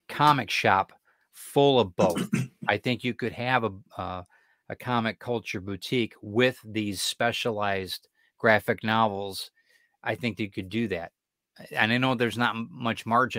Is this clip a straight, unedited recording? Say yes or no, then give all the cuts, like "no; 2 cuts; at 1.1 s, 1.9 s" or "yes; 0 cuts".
yes; 0 cuts